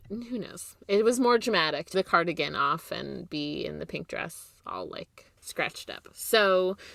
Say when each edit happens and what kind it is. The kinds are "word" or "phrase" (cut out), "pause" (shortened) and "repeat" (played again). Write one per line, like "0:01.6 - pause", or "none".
0:01.9 - phrase
0:05.4 - pause